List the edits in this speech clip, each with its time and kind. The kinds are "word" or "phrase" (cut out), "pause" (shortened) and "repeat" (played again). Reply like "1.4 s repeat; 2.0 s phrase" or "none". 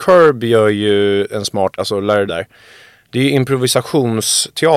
1.8 s word; 2.3 s word

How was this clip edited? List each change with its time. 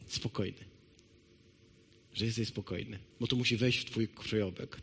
3.1 s pause

